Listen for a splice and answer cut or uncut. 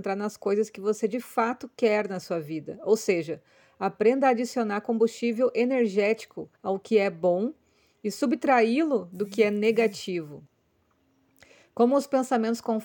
cut